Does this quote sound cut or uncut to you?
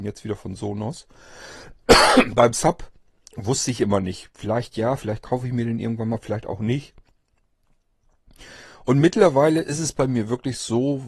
uncut